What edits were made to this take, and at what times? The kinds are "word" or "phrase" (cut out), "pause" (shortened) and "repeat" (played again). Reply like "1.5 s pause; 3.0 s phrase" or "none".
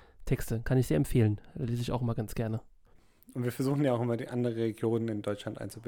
none